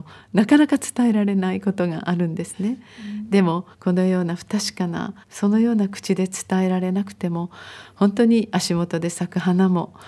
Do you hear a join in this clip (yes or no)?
yes